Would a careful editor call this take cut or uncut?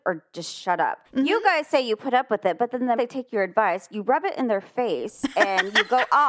cut